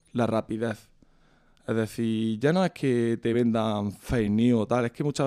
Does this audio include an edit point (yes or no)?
no